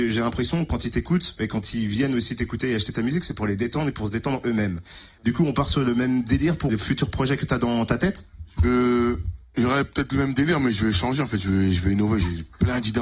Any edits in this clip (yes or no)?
yes